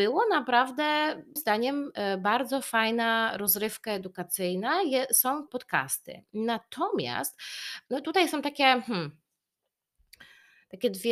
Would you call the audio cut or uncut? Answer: cut